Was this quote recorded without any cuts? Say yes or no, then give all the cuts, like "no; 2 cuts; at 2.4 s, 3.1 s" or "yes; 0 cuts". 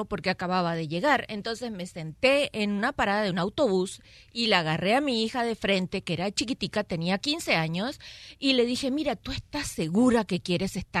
yes; 0 cuts